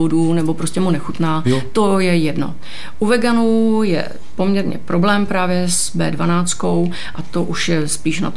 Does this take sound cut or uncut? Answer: uncut